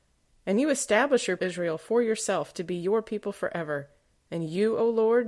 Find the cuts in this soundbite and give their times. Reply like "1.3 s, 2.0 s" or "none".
1.4 s